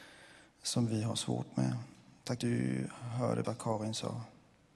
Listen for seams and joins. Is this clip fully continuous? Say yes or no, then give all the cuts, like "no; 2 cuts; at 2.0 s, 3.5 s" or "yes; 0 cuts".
no; 2 cuts; at 2.4 s, 3.4 s